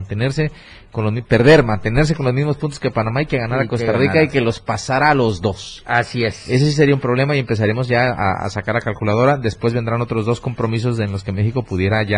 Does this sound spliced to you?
no; 0 cuts

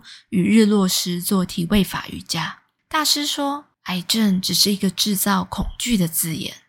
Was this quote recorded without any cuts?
yes; 0 cuts

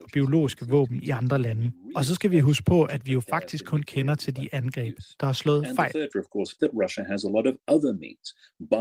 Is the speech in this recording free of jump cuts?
no; 2 cuts; at 6.1 s, 6.6 s

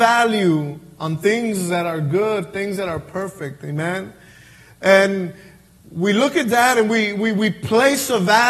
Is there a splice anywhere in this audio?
no; 0 cuts

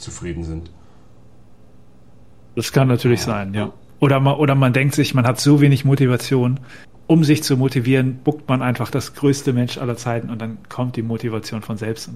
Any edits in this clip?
no; 0 cuts

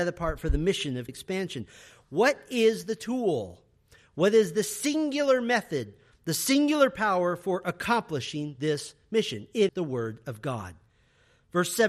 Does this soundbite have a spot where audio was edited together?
yes; 2 cuts; at 1.1 s, 9.7 s

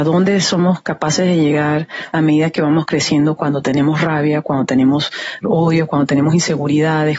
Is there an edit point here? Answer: no; 0 cuts

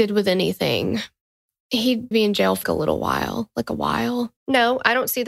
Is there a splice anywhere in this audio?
yes; 3 cuts; at 2.1 s, 2.6 s, 4.4 s

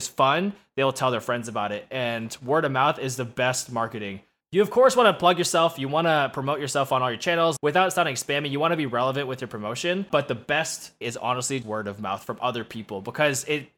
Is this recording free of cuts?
no; 3 cuts; at 7.6 s, 11.0 s, 11.6 s

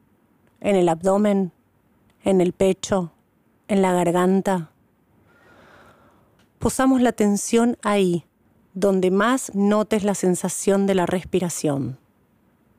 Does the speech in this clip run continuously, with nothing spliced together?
yes; 0 cuts

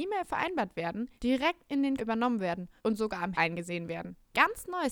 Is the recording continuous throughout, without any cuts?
no; 4 cuts; at 1.2 s, 2.0 s, 2.8 s, 3.4 s

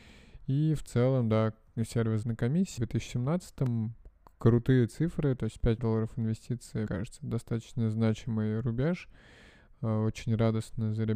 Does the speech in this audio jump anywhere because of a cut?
yes; 4 cuts; at 2.2 s, 2.8 s, 5.8 s, 6.9 s

